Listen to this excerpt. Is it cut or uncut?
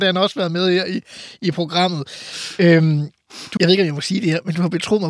cut